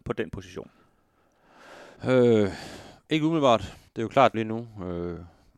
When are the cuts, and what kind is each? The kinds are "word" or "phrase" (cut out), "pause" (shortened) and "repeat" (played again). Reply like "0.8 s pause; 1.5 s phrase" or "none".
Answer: 2.0 s pause; 3.9 s pause; 4.3 s phrase